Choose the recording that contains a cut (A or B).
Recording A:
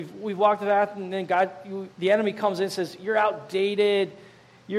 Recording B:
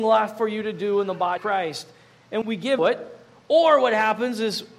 B